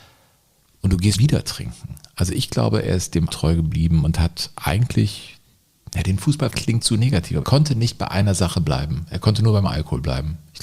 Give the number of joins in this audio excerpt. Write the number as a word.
five